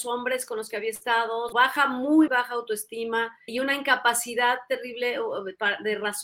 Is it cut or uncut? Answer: cut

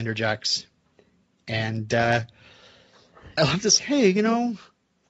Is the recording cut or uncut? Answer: cut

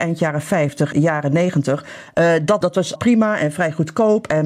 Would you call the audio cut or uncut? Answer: cut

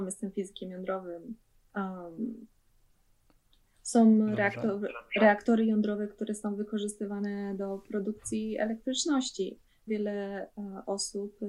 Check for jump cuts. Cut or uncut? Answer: cut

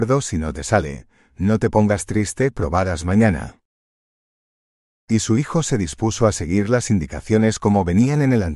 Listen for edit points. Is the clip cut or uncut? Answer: uncut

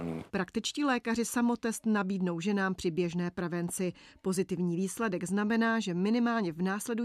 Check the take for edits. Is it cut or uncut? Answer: uncut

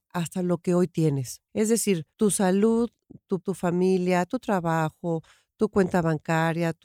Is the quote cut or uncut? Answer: cut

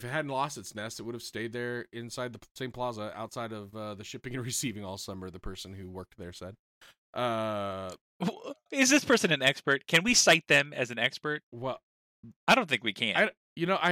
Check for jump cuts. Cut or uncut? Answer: uncut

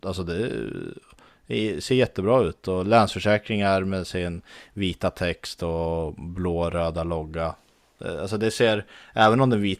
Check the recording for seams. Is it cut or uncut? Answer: uncut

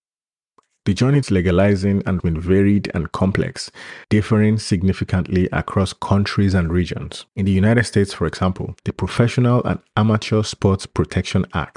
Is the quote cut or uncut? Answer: cut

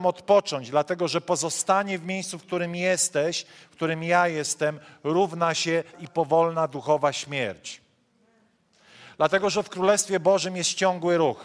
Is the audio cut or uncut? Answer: cut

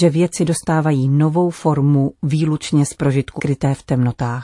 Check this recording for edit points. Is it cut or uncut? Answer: cut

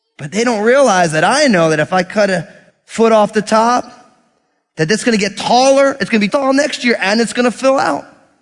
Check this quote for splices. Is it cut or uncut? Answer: cut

